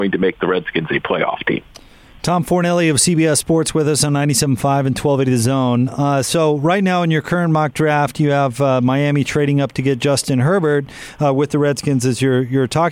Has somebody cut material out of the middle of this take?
no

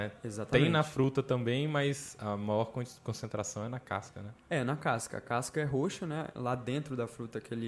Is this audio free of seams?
yes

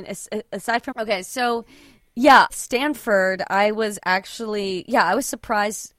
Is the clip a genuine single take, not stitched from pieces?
no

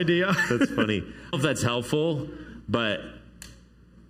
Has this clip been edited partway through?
yes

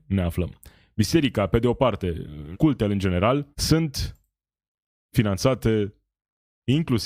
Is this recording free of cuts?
no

